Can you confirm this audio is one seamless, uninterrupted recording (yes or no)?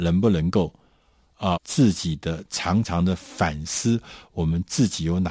no